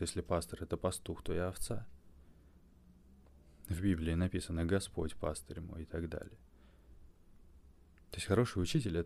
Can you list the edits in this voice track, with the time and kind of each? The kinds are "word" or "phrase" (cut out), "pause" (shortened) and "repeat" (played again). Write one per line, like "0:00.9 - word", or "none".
none